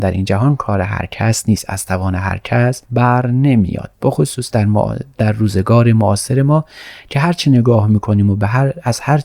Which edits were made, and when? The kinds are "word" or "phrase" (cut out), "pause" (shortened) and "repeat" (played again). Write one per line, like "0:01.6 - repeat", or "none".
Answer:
0:02.8 - pause
0:03.9 - word